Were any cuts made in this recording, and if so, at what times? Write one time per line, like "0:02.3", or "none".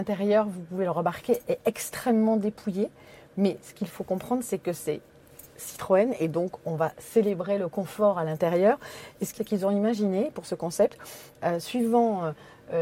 0:09.4

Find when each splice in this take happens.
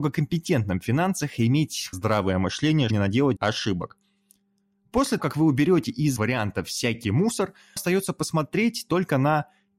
0:01.9
0:02.9
0:03.4
0:05.2
0:06.2
0:07.0
0:07.8

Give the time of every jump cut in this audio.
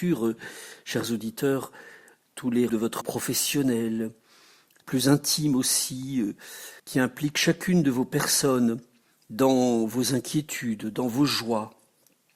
0:02.7
0:03.0
0:04.8
0:06.8

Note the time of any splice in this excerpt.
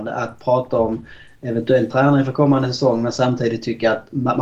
0:01.9

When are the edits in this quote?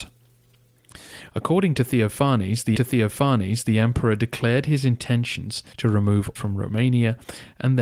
0:02.7
0:05.7
0:06.4

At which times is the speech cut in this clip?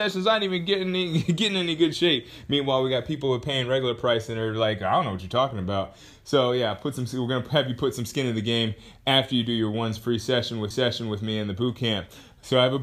0:10.7

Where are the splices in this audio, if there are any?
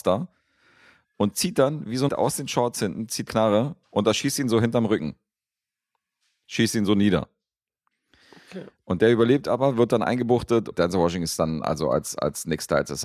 0:02.1
0:03.3
0:10.7

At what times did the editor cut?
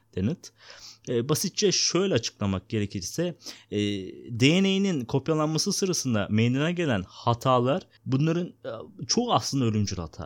0:08.0

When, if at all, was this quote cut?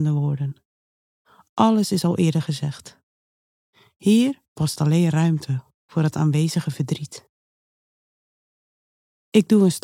none

